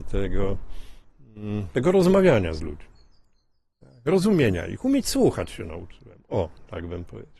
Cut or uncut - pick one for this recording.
uncut